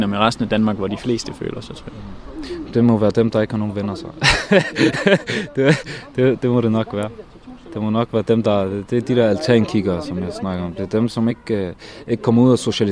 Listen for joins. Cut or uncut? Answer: uncut